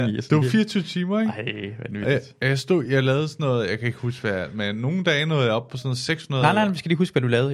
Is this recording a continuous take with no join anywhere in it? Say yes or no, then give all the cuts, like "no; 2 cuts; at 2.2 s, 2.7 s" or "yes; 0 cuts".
yes; 0 cuts